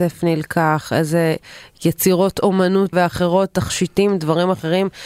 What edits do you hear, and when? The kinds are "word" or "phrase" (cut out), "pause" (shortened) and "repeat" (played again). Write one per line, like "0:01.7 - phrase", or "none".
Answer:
0:02.9 - word